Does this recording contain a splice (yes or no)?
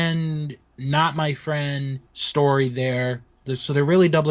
yes